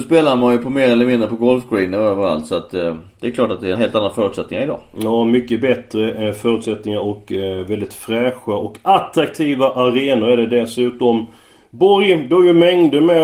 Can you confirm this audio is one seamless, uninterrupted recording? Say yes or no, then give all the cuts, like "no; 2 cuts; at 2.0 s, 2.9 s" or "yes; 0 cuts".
no; 1 cut; at 3.7 s